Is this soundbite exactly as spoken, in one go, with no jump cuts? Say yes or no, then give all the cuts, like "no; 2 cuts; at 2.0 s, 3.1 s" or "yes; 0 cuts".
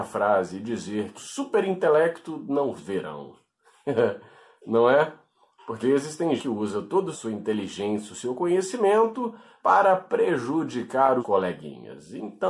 no; 6 cuts; at 1.2 s, 2.8 s, 5.8 s, 6.4 s, 7.1 s, 11.2 s